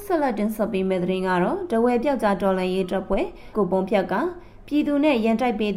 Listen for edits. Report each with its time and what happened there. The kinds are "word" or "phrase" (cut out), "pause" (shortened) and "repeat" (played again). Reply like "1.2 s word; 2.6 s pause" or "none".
3.5 s word